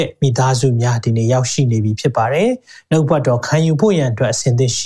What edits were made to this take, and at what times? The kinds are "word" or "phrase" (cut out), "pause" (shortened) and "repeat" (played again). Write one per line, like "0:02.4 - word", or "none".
none